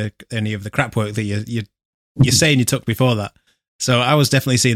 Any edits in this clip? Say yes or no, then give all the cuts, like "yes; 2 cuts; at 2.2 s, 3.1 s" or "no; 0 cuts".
no; 0 cuts